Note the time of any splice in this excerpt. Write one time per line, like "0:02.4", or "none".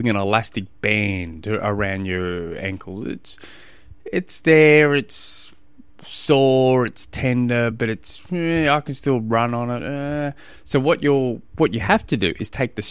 none